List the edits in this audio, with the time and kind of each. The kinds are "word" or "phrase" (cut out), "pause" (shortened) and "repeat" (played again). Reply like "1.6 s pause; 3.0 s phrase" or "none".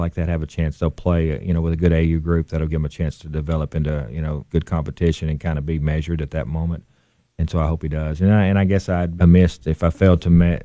2.7 s word; 4.5 s word; 9.2 s word